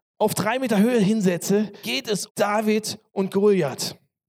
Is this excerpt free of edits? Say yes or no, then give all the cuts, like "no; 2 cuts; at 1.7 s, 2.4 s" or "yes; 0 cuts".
no; 2 cuts; at 1.8 s, 2.3 s